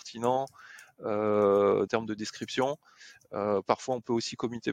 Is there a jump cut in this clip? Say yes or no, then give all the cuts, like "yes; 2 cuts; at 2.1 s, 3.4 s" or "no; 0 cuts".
yes; 1 cut; at 1.9 s